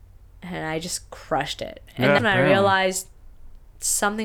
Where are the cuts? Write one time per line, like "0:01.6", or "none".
0:02.2